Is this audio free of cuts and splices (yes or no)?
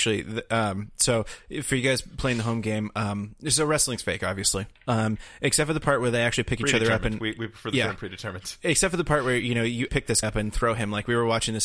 no